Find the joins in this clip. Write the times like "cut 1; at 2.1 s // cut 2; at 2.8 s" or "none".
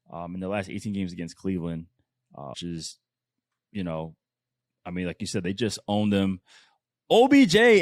cut 1; at 2.5 s